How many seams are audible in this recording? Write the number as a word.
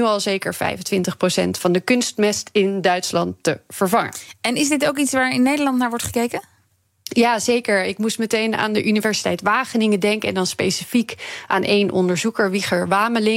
zero